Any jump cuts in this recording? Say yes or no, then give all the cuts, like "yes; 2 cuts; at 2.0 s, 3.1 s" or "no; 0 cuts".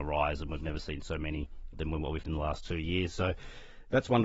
yes; 2 cuts; at 1.7 s, 2.2 s